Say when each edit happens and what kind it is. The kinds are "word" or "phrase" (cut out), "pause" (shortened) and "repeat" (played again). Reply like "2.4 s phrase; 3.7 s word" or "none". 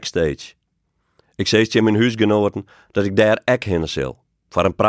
none